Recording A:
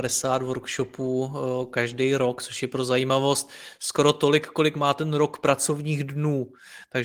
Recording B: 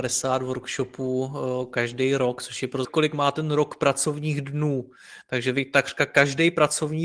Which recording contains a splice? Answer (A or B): B